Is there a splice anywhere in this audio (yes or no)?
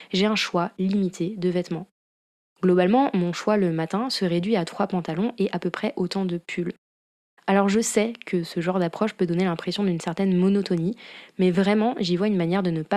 no